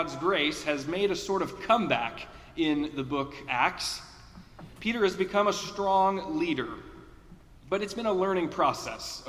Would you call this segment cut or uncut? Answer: cut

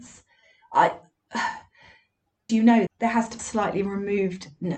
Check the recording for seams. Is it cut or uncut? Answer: cut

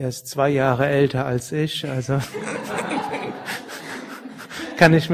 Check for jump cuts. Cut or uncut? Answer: uncut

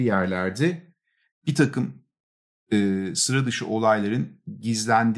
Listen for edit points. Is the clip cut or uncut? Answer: uncut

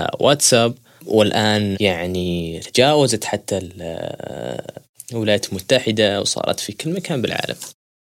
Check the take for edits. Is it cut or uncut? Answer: uncut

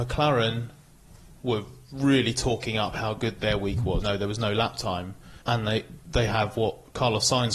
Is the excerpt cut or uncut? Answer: cut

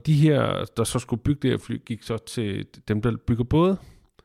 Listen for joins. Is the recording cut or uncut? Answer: uncut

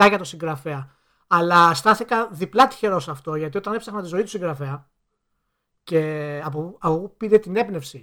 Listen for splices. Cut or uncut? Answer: uncut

